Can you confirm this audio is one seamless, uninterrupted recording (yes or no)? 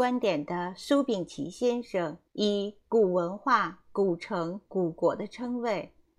no